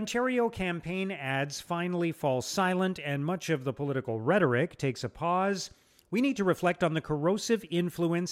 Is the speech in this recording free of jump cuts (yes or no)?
yes